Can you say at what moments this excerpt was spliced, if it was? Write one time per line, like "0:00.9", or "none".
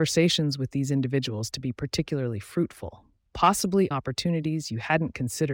0:03.9